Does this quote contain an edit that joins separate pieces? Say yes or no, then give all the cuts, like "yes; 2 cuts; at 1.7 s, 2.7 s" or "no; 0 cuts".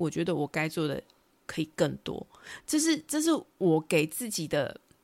no; 0 cuts